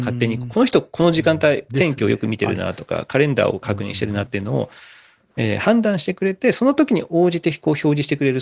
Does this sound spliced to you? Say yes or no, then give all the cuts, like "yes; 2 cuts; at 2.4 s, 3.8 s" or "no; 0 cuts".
no; 0 cuts